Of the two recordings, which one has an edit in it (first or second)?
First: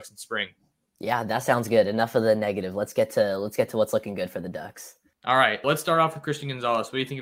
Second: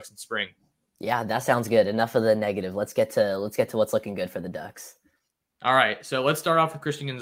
first